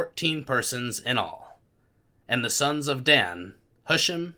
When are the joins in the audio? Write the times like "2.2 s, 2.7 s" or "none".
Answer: none